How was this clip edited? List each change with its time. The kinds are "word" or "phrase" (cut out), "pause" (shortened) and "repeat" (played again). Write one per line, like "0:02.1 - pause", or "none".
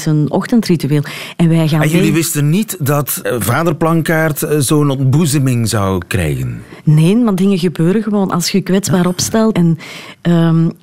0:03.2 - word
0:09.5 - word